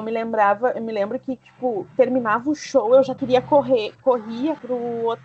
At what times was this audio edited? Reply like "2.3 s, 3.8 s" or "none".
none